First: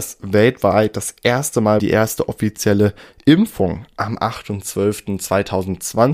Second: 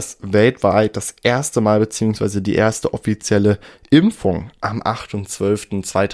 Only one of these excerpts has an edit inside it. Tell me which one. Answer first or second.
first